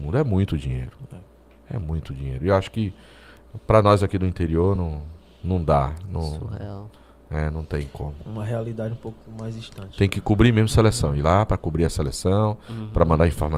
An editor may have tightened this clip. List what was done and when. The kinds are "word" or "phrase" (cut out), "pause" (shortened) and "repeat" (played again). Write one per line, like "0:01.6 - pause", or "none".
none